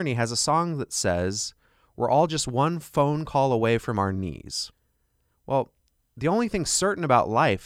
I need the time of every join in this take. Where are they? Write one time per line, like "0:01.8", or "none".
none